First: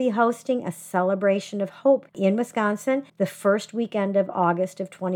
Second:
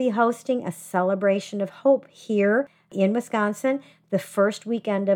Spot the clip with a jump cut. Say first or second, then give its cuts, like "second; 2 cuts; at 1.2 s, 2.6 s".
first; 2 cuts; at 2.1 s, 3.1 s